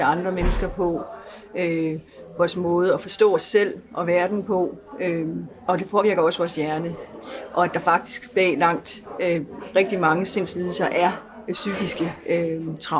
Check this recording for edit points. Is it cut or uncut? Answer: uncut